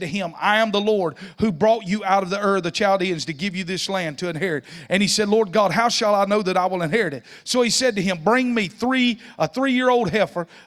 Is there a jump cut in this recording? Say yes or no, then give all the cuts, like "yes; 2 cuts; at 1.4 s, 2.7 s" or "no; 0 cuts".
no; 0 cuts